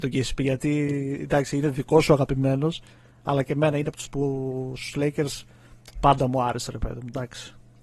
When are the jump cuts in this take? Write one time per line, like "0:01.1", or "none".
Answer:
0:04.1

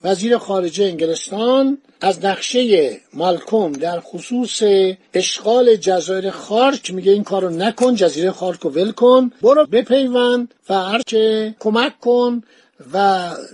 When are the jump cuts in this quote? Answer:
0:09.6
0:11.0

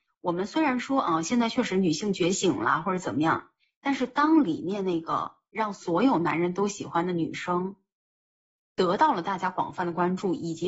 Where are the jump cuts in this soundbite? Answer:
none

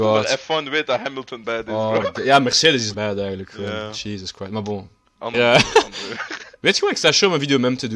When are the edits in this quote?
0:01.4
0:02.0
0:02.9
0:05.3

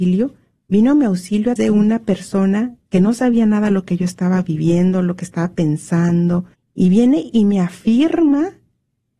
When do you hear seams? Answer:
0:01.6
0:06.5

